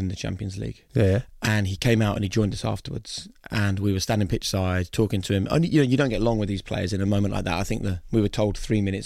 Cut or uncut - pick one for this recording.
uncut